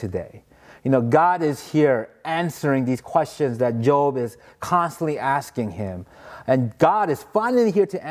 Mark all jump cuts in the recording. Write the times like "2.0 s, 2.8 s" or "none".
none